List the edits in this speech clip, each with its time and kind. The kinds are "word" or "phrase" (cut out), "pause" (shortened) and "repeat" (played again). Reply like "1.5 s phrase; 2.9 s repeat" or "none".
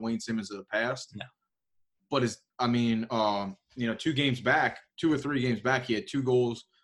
none